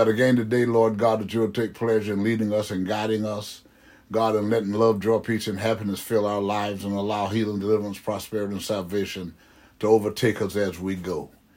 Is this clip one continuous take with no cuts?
yes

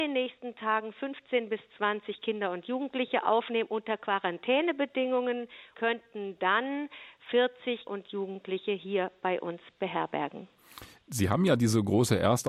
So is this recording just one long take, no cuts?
no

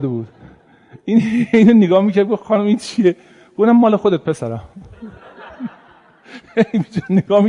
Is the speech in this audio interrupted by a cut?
no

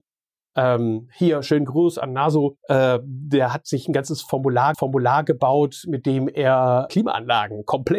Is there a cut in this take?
yes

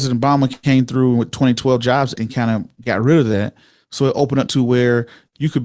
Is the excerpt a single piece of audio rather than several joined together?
no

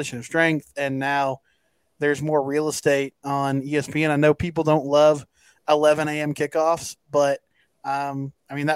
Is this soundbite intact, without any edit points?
yes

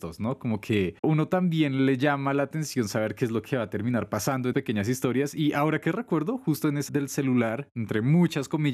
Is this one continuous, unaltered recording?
no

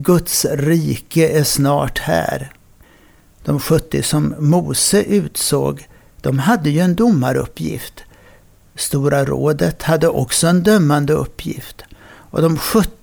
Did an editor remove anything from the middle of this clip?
no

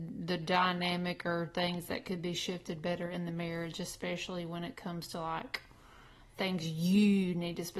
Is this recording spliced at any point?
no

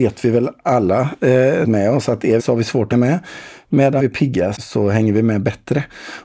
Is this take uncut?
no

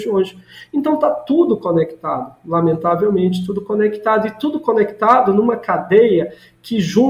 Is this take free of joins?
yes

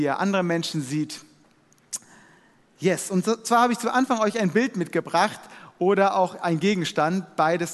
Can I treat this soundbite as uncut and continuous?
yes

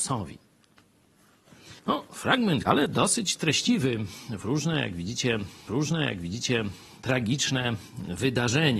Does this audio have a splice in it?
yes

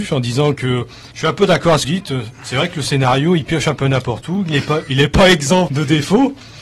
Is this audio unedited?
no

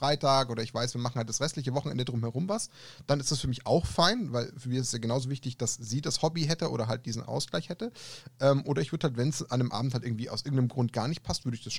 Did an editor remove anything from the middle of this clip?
no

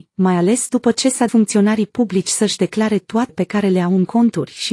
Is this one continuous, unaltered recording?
no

